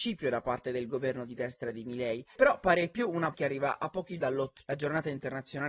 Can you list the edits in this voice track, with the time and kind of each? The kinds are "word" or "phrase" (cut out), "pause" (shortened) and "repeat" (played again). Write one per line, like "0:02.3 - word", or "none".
0:02.3 - word
0:03.3 - word
0:04.2 - word
0:04.6 - word